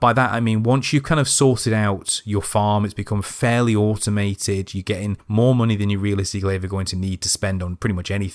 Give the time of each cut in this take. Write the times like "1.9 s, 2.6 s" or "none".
5.2 s